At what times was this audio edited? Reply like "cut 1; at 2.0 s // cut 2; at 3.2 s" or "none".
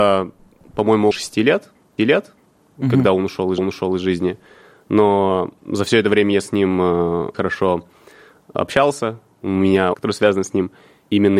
cut 1; at 1.1 s // cut 2; at 2.0 s // cut 3; at 3.6 s // cut 4; at 5.6 s // cut 5; at 7.3 s // cut 6; at 9.9 s